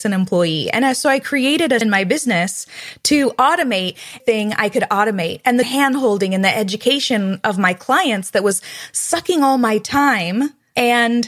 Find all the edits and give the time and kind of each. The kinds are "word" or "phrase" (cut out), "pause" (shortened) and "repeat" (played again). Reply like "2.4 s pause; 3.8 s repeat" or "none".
1.8 s word; 4.2 s phrase; 5.6 s phrase